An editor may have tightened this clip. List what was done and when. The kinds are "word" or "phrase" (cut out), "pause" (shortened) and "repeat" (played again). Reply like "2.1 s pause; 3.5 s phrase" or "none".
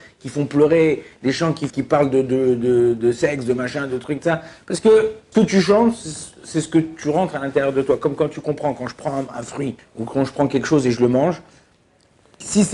1.7 s phrase; 5.3 s word; 9.8 s pause